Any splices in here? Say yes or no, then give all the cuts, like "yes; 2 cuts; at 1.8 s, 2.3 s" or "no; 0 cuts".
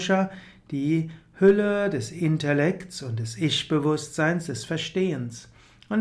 no; 0 cuts